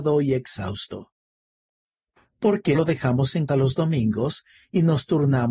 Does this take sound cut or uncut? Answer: cut